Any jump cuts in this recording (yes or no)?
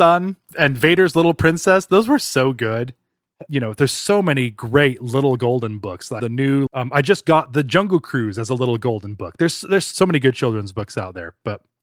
yes